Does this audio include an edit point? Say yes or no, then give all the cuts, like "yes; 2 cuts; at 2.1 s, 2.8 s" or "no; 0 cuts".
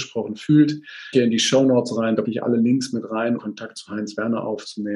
yes; 3 cuts; at 1.1 s, 2.2 s, 3.4 s